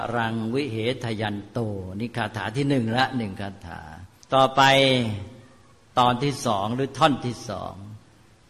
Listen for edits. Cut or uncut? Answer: cut